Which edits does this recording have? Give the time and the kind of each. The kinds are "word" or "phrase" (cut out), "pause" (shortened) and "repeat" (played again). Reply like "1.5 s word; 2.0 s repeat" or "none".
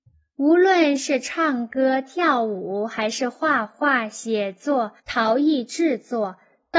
5.0 s pause